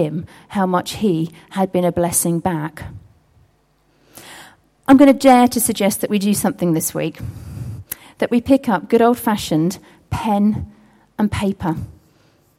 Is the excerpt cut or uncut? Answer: uncut